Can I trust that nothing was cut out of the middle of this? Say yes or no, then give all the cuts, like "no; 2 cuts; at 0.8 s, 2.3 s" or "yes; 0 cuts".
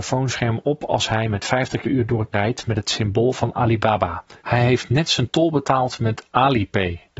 no; 3 cuts; at 1.8 s, 2.3 s, 4.4 s